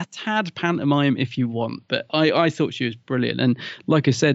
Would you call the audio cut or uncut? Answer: uncut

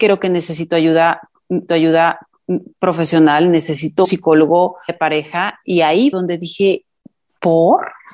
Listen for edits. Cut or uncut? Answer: cut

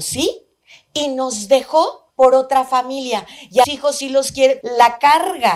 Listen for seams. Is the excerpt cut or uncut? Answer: cut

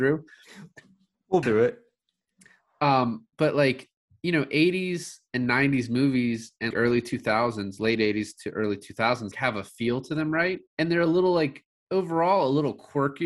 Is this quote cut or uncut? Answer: cut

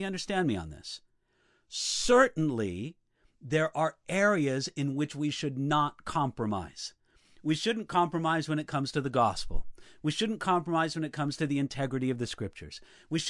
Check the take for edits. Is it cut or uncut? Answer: uncut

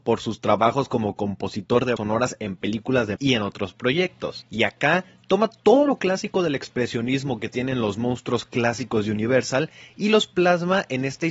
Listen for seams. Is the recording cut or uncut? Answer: cut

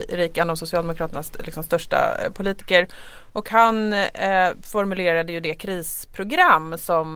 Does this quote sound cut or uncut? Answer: uncut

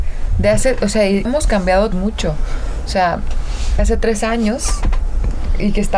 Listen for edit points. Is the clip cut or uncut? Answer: cut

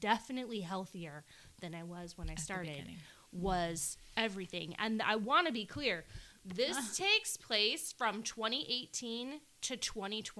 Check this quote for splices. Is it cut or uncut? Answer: uncut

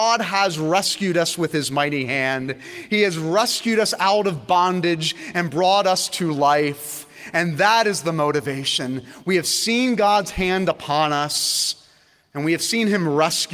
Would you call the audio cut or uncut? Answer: uncut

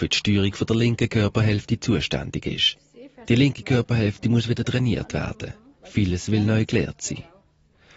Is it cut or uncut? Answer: uncut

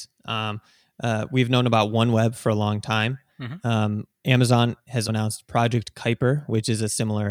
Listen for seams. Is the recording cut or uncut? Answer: cut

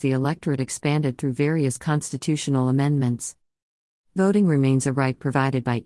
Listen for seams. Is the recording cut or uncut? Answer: uncut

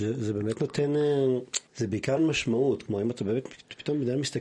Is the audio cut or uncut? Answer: cut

